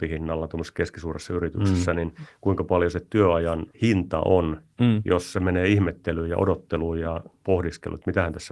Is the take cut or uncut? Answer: cut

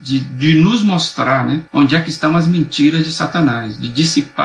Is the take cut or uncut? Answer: cut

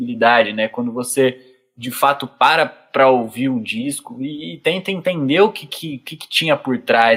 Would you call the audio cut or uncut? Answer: uncut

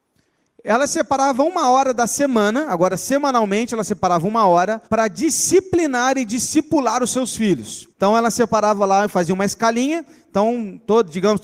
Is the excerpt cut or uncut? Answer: cut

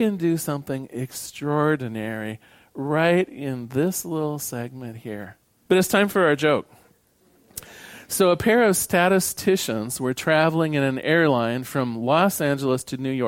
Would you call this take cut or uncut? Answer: uncut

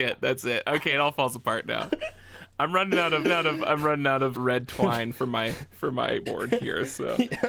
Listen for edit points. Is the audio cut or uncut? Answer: cut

